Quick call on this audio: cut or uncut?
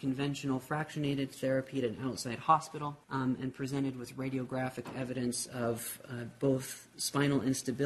cut